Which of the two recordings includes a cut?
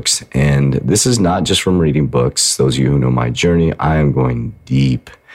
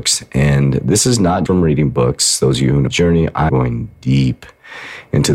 second; 3 cuts; at 1.5 s, 2.9 s, 3.5 s

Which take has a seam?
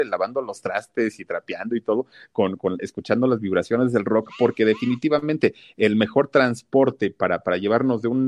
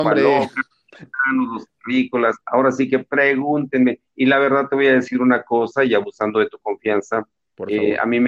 second; 1 cut; at 2.4 s

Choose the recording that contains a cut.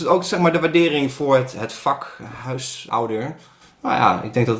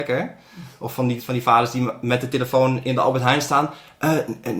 second; 1 cut; at 1.2 s

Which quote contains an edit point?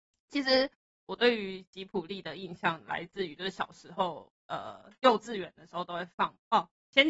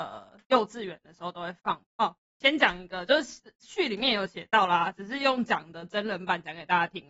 first; 1 cut; at 4.4 s

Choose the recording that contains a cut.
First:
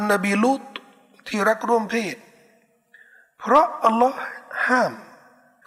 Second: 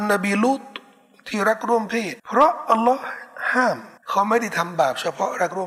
second; 2 cuts; at 2.2 s, 4.0 s

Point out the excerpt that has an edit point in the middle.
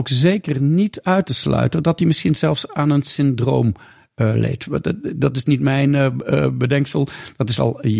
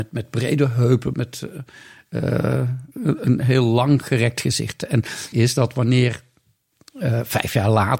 second; 3 cuts; at 1.1 s, 2.9 s, 5.3 s

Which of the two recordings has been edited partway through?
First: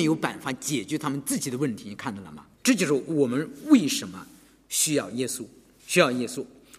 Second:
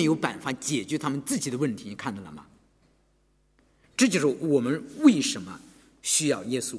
first; 1 cut; at 2.5 s

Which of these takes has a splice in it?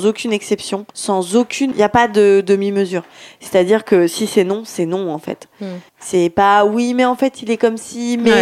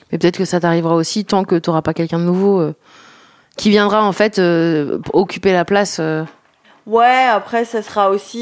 first; 3 cuts; at 0.9 s, 1.7 s, 5.9 s

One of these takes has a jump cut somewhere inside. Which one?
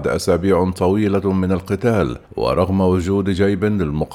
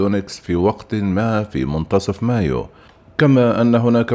first; 1 cut; at 2.2 s

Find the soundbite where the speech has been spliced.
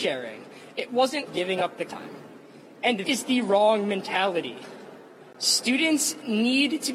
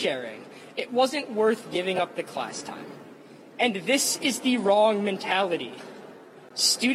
first; 3 cuts; at 1.3 s, 1.9 s, 3.0 s

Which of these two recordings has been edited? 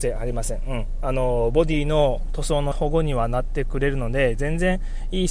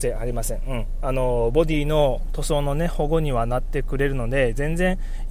first; 1 cut; at 2.7 s

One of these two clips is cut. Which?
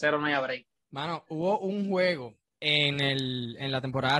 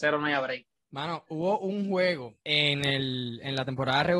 second; 1 cut; at 2.4 s

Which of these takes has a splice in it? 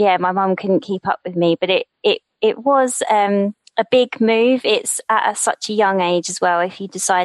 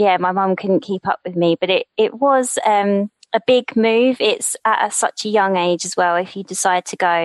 second; 1 cut; at 1.9 s

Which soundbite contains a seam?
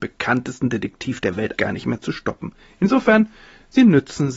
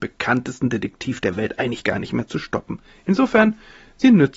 first; 1 cut; at 1.6 s

